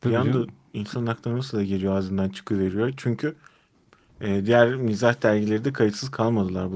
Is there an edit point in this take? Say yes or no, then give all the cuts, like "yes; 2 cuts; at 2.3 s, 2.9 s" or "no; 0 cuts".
no; 0 cuts